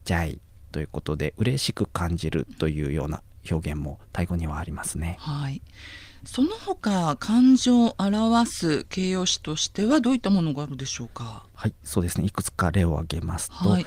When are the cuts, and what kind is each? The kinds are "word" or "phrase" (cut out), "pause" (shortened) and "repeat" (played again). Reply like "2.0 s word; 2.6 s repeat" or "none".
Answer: 11.5 s pause